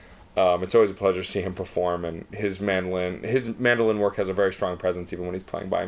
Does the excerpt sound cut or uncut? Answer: uncut